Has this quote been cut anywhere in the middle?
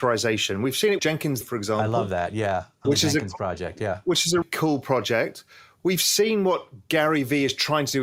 yes; 4 cuts; at 1.0 s, 1.4 s, 2.8 s, 4.4 s

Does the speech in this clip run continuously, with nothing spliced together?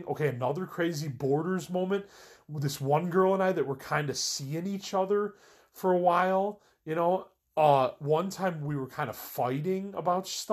yes; 0 cuts

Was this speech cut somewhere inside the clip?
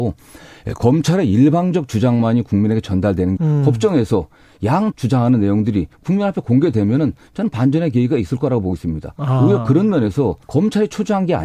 yes; 3 cuts; at 3.4 s, 4.9 s, 10.4 s

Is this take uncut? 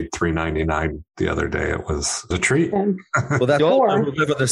no; 2 cuts; at 2.3 s, 3.6 s

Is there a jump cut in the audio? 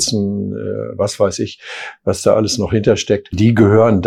no; 0 cuts

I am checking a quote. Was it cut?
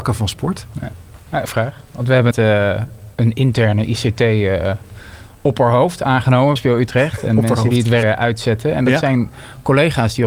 yes; 5 cuts; at 1.4 s, 2.3 s, 3.1 s, 6.6 s, 8.0 s

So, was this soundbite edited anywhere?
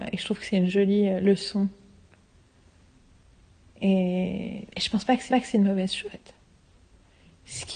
yes; 3 cuts; at 4.7 s, 5.3 s, 6.0 s

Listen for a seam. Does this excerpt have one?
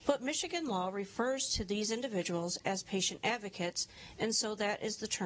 no; 0 cuts

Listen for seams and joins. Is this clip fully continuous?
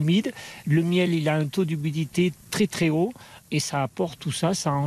yes; 0 cuts

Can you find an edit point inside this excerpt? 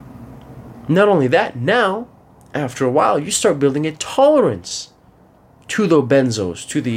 no; 0 cuts

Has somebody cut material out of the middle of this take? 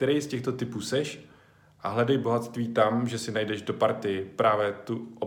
no; 0 cuts

